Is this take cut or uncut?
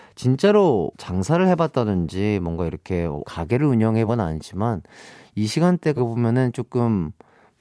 cut